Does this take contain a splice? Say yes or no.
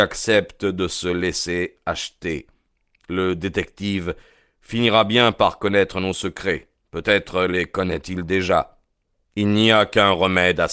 no